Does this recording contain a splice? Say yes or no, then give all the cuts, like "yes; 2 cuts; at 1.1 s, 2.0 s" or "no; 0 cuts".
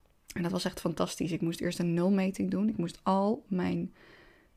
no; 0 cuts